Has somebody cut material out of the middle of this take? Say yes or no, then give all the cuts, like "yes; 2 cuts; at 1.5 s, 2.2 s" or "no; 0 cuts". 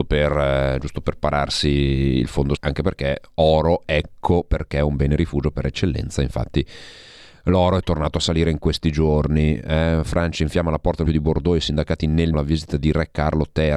yes; 3 cuts; at 2.6 s, 11.1 s, 12.3 s